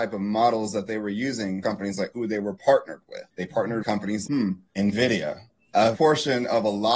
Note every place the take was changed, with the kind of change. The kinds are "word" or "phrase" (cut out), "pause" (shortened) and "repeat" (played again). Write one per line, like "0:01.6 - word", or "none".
0:01.6 - word
0:02.1 - word
0:03.8 - word
0:04.3 - word
0:05.9 - word